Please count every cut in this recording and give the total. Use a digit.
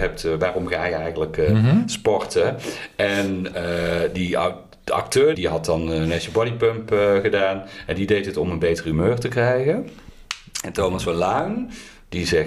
1